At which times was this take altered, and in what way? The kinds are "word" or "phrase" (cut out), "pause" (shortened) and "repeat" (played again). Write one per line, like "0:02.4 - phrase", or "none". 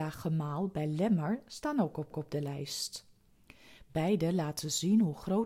0:02.1 - repeat